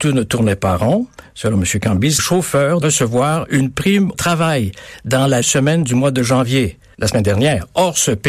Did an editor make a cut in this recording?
yes; 5 cuts; at 2.2 s, 2.8 s, 4.1 s, 5.4 s, 6.9 s

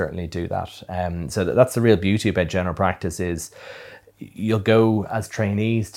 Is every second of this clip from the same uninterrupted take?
no; 1 cut; at 4.1 s

